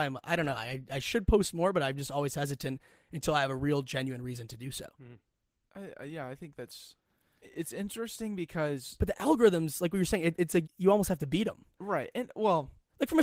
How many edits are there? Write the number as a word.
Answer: three